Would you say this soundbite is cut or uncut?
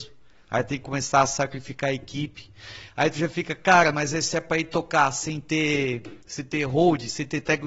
cut